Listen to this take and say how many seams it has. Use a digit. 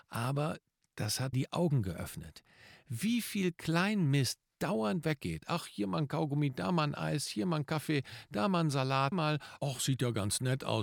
3